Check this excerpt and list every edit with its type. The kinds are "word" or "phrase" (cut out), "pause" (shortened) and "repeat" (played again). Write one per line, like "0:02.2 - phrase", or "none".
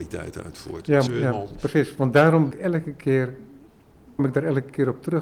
0:01.1 - word
0:02.5 - word
0:04.2 - word

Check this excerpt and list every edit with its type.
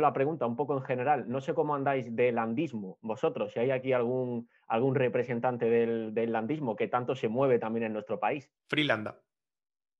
0:08.6 - pause

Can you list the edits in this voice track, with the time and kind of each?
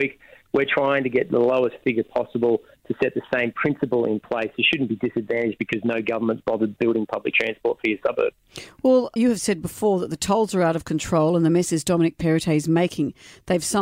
0:09.2 - word

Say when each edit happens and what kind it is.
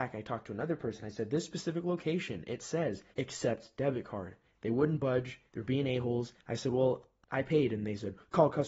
0:03.1 - pause
0:04.4 - pause
0:05.5 - pause

